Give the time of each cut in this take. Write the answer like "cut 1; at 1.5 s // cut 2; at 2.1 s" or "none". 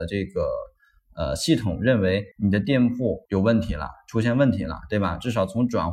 cut 1; at 2.3 s // cut 2; at 3.3 s